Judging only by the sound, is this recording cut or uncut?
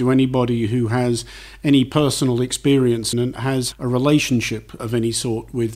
cut